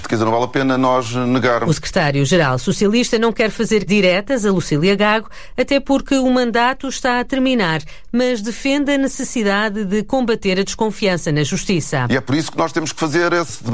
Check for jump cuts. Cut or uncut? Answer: cut